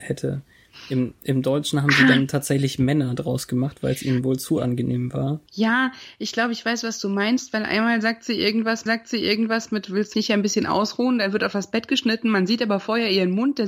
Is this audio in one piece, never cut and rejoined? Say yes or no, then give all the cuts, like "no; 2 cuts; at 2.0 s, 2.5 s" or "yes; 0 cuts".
no; 3 cuts; at 5.5 s, 8.9 s, 10.1 s